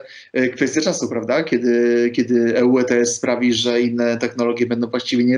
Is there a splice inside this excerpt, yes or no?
no